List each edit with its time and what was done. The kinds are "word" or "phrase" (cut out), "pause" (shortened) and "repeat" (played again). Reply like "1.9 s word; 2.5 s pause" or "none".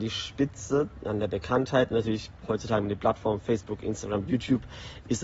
none